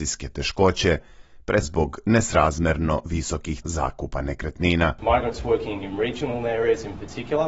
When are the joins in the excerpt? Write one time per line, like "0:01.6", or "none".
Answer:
0:01.6
0:03.6